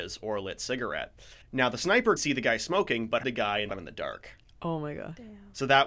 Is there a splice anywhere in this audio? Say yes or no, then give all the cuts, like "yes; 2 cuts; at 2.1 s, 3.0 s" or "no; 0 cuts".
yes; 4 cuts; at 1.4 s, 2.2 s, 3.2 s, 3.7 s